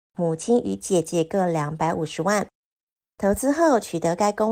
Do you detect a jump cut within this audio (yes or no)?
no